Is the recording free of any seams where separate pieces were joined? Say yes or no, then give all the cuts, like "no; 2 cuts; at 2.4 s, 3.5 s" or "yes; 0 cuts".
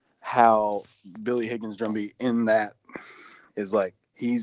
yes; 0 cuts